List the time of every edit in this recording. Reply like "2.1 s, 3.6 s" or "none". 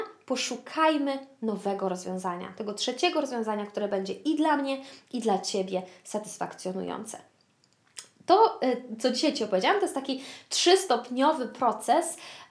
none